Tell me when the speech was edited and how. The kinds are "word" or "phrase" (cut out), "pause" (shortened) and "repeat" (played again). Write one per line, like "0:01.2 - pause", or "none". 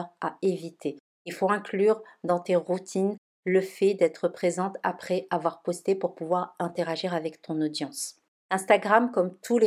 none

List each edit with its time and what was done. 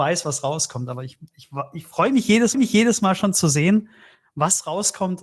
0:02.5 - repeat

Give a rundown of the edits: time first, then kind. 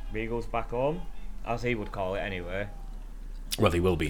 none

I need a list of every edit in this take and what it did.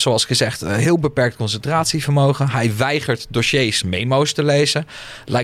0:03.8 - phrase

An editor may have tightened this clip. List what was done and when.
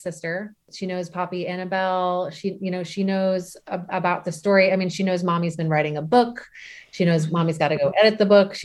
none

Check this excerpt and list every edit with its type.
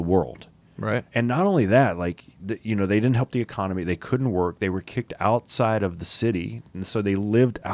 0:01.1 - word

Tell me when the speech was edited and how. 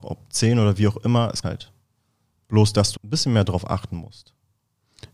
0:01.4 - word
0:03.0 - word

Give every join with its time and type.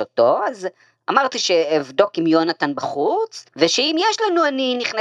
0:03.5 - pause

